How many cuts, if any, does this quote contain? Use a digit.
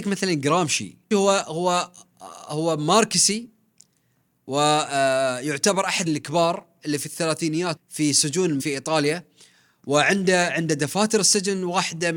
4